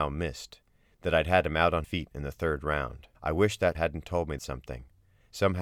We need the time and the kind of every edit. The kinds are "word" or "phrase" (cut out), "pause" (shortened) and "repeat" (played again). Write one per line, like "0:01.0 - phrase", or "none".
0:01.8 - word
0:03.1 - pause
0:03.7 - word
0:04.4 - word

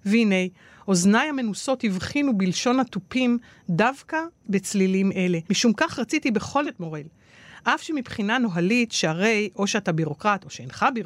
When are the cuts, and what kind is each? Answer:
0:05.5 - pause
0:06.6 - phrase

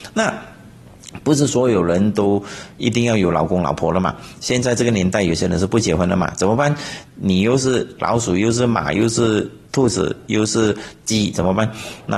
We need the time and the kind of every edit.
0:09.7 - pause

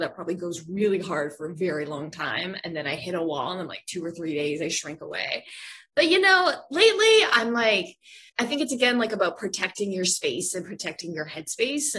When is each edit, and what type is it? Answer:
0:08.3 - pause

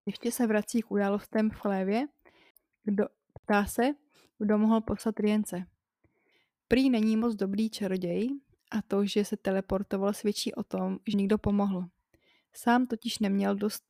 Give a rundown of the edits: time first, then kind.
0:11.1 - word

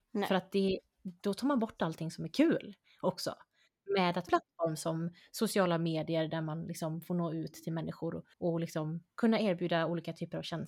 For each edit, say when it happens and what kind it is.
0:04.3 - phrase
0:08.3 - pause

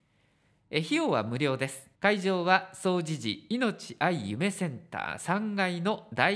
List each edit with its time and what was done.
0:01.9 - pause

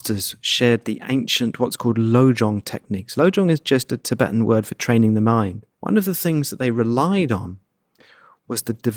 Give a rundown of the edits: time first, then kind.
0:05.7 - pause

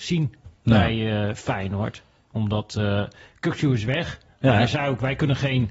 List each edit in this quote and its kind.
none

